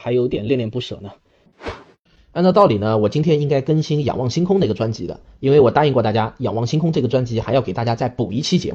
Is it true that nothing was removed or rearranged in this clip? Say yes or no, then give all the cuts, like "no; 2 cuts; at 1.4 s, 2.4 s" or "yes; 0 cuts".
no; 1 cut; at 2.1 s